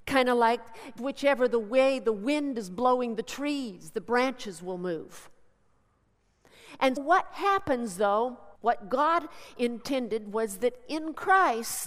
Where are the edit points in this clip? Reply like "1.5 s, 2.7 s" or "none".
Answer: 1.0 s, 7.0 s, 8.6 s